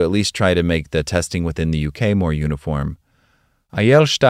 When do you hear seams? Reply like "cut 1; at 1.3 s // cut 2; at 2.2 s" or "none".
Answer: none